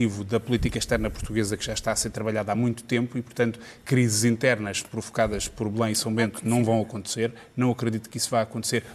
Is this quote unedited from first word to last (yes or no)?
yes